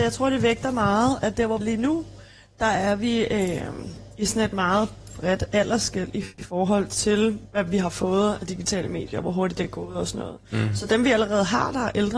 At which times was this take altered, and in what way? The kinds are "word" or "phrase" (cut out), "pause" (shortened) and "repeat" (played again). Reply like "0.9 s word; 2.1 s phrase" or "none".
1.6 s word